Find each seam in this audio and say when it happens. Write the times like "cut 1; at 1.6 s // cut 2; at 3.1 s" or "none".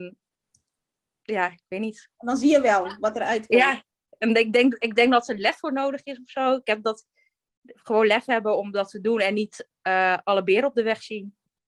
none